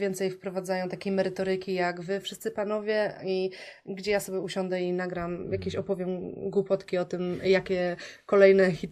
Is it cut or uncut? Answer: uncut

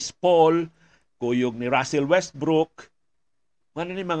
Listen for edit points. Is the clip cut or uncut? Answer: uncut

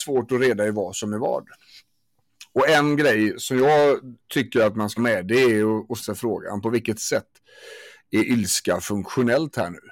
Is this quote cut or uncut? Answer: cut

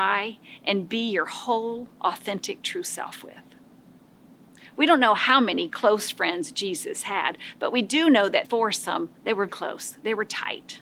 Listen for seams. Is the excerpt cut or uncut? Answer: cut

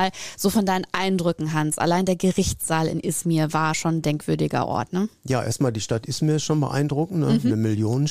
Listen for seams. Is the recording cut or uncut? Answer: uncut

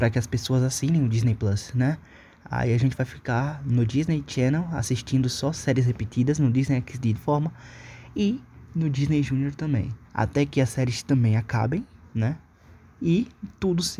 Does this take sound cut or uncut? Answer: cut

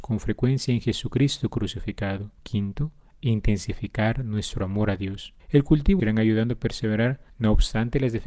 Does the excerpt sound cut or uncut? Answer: cut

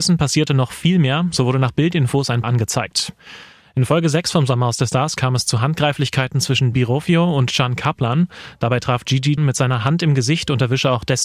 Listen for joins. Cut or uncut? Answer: cut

